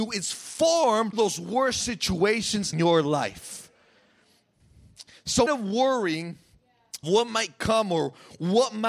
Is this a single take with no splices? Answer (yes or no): no